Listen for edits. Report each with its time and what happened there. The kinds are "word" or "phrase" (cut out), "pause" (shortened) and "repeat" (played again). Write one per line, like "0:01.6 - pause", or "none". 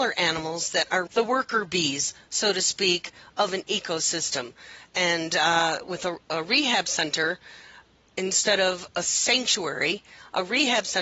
0:01.1 - word

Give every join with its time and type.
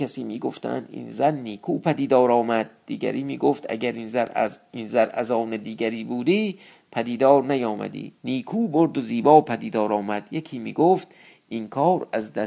0:08.2 - pause

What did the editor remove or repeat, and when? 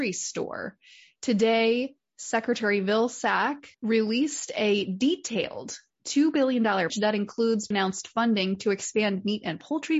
0:03.7 - pause
0:06.9 - word
0:07.7 - word

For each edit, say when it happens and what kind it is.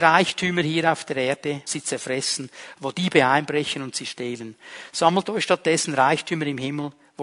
0:01.7 - phrase

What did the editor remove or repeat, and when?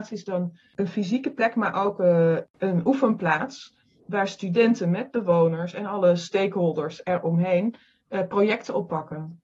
none

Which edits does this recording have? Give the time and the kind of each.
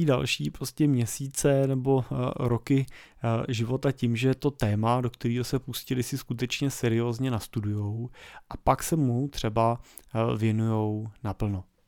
none

